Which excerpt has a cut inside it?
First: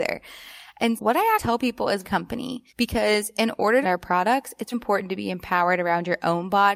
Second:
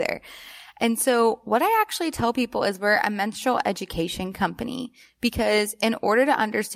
first; 6 cuts; at 1.0 s, 1.4 s, 2.0 s, 2.7 s, 3.8 s, 4.7 s

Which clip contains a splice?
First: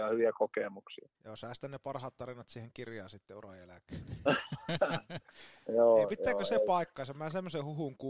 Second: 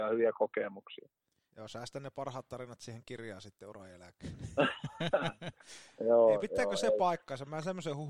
first; 1 cut; at 1.1 s

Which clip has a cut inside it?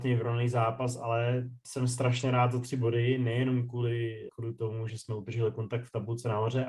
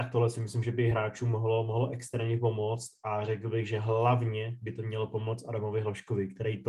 first; 2 cuts; at 4.3 s, 4.9 s

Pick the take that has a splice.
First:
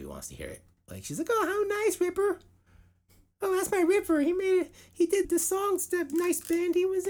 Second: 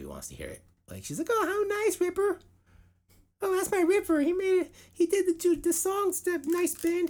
first; 1 cut; at 5.2 s

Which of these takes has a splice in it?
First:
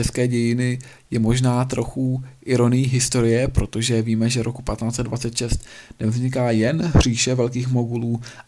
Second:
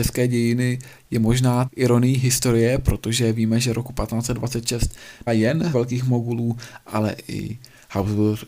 second; 3 cuts; at 1.7 s, 5.3 s, 5.7 s

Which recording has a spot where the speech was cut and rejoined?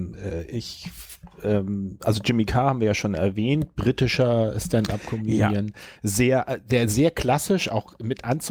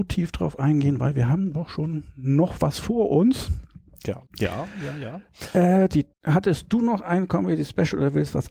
second; 2 cuts; at 4.3 s, 6.1 s

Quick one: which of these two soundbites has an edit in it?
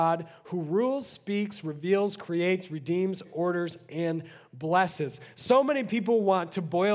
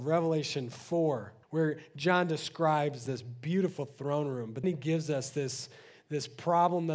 second; 2 cuts; at 1.4 s, 4.6 s

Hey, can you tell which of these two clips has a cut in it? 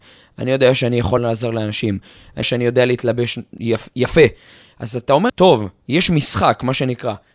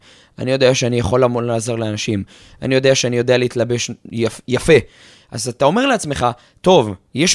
first; 3 cuts; at 1.2 s, 2.4 s, 5.3 s

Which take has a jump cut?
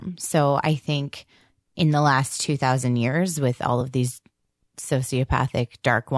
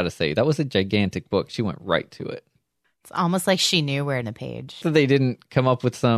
second; 2 cuts; at 4.2 s, 4.8 s

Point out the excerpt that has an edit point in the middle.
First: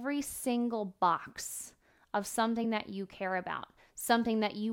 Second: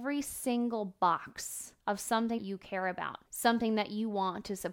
second; 3 cuts; at 1.8 s, 2.4 s, 3.3 s

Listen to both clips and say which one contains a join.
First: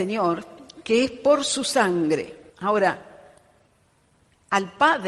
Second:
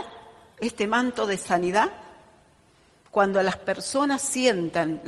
first; 1 cut; at 2.5 s

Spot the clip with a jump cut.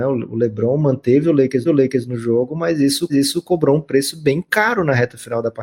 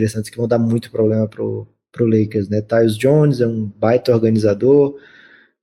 first; 2 cuts; at 1.6 s, 3.1 s

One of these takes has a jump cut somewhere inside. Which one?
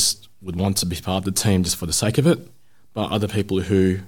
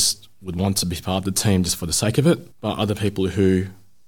second; 1 cut; at 2.5 s

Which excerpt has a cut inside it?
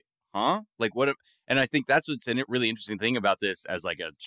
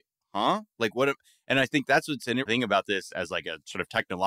second; 1 cut; at 2.5 s

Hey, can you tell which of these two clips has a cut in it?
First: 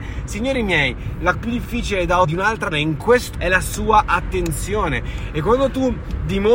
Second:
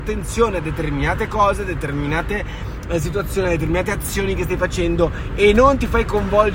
first; 4 cuts; at 1.3 s, 2.2 s, 2.7 s, 3.3 s

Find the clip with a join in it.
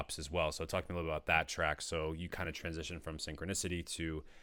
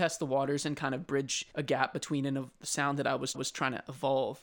second; 2 cuts; at 1.5 s, 3.3 s

